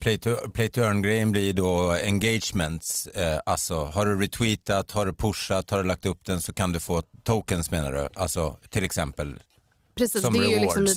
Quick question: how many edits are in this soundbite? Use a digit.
0